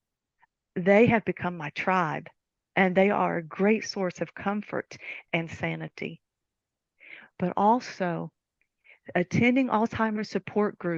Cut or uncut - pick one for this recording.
uncut